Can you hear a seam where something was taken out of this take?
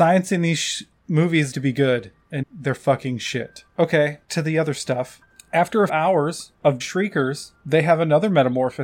yes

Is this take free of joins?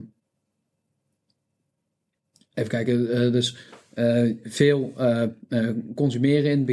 yes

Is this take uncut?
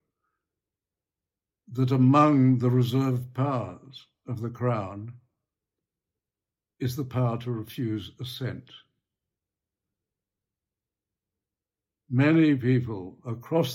yes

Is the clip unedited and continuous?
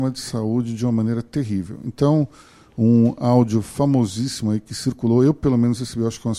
yes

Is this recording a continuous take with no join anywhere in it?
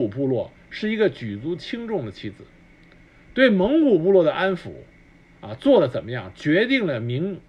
yes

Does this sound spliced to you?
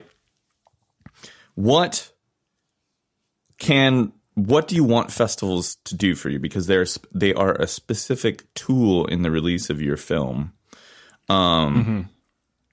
no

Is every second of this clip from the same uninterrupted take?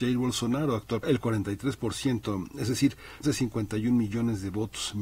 no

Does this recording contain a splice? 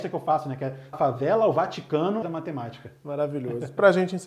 yes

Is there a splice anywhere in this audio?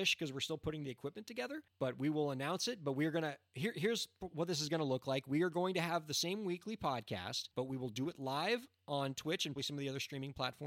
yes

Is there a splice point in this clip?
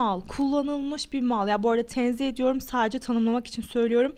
no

